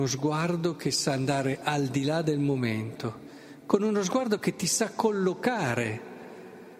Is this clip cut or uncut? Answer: uncut